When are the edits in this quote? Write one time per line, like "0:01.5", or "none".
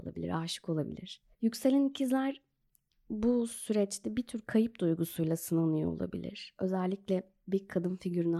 0:01.3